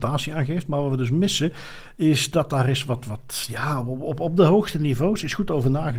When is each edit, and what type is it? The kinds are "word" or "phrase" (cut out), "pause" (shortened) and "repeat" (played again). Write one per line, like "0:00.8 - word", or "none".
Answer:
none